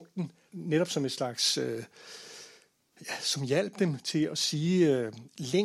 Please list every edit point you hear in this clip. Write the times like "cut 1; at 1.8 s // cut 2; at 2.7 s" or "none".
none

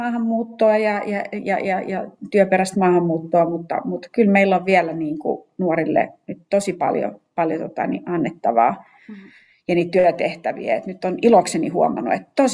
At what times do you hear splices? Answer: none

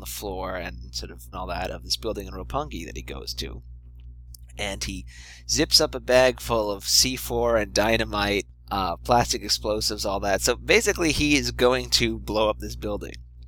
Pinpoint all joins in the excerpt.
cut 1; at 1.3 s

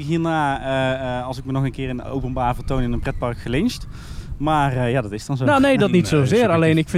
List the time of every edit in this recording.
none

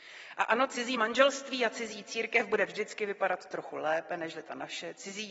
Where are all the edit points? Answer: none

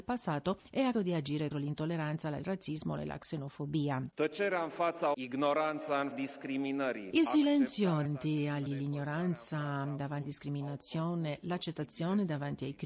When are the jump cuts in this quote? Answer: cut 1; at 0.9 s // cut 2; at 1.5 s // cut 3; at 2.4 s // cut 4; at 3.0 s // cut 5; at 5.1 s // cut 6; at 6.1 s // cut 7; at 8.0 s // cut 8; at 8.7 s // cut 9; at 10.2 s

